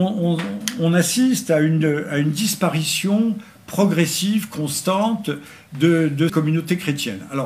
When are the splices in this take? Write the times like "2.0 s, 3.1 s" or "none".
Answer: 6.3 s